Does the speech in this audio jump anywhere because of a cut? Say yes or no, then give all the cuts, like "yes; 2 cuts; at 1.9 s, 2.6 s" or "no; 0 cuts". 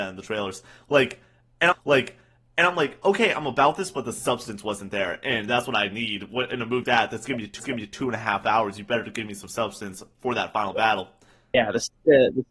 yes; 3 cuts; at 1.7 s, 6.8 s, 7.6 s